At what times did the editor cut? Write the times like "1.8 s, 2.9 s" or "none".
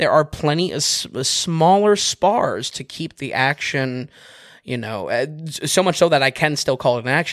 none